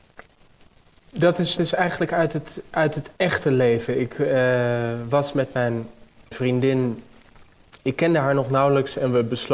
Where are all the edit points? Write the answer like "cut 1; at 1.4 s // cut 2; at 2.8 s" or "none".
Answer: cut 1; at 1.6 s // cut 2; at 3.2 s // cut 3; at 6.3 s